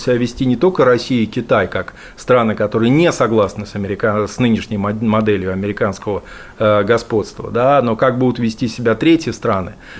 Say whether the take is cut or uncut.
uncut